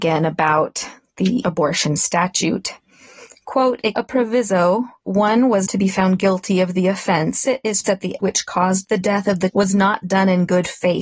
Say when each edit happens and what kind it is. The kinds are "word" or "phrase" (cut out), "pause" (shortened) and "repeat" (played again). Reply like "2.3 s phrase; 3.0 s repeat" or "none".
1.4 s word; 3.9 s word; 5.1 s word; 5.7 s word; 7.5 s word; 7.8 s word; 8.2 s word; 9.5 s word